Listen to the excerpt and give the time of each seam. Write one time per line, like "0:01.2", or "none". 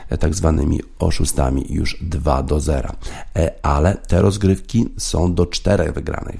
none